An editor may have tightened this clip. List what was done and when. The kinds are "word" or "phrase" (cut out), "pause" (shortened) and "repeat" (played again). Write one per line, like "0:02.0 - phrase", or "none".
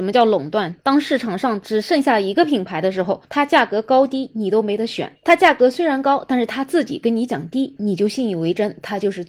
0:03.2 - pause